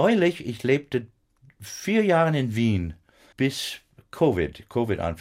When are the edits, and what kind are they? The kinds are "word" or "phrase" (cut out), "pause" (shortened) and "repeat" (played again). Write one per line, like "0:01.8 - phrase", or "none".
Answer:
0:03.3 - word